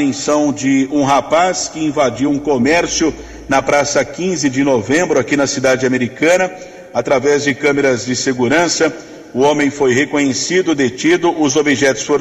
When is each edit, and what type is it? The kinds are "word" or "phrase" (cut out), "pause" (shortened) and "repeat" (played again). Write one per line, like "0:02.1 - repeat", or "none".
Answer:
none